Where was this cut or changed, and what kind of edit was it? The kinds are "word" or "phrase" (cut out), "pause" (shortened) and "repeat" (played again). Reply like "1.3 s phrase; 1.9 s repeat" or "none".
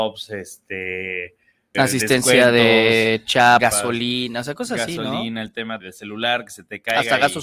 1.7 s word; 3.6 s word; 5.8 s word